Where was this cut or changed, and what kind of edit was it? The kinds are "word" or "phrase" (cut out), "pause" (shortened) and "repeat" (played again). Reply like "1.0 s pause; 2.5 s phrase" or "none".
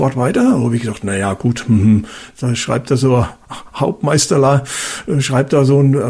none